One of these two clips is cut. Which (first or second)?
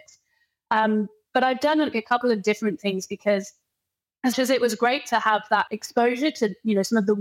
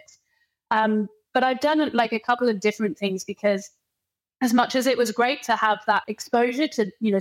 first